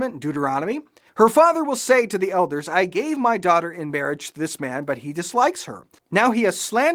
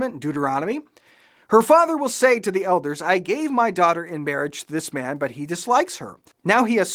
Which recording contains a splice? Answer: first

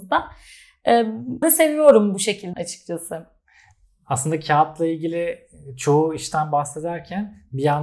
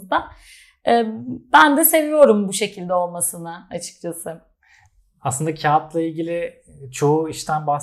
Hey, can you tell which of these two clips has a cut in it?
first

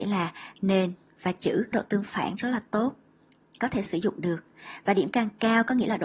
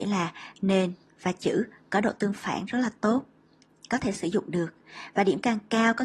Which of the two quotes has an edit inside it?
first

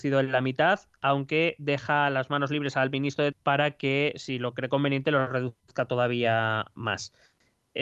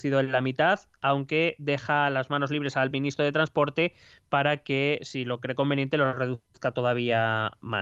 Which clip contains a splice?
first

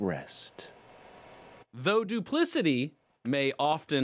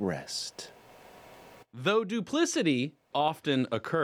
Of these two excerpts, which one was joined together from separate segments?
second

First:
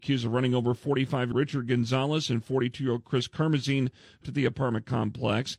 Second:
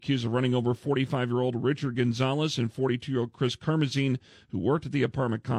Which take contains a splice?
first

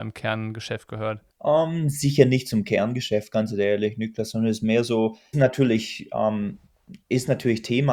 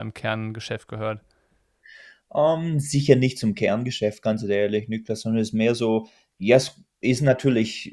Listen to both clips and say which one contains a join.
first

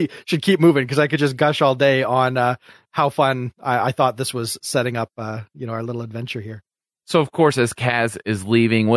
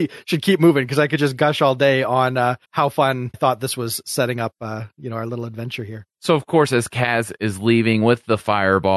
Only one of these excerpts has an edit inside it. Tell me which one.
second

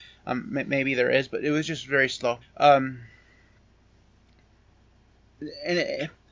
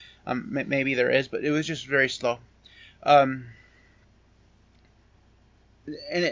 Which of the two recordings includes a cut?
first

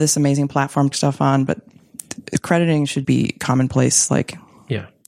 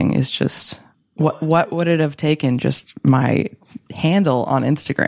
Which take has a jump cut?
first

